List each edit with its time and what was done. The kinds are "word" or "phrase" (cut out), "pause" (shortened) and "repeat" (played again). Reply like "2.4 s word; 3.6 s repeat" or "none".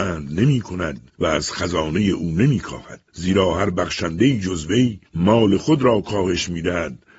1.1 s pause; 3.1 s pause; 5.1 s pause